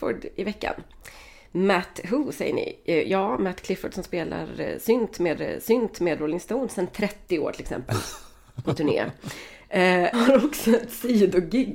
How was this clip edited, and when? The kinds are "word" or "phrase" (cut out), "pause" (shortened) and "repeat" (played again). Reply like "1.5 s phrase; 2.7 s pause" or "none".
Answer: 5.4 s repeat; 8.6 s word; 10.1 s word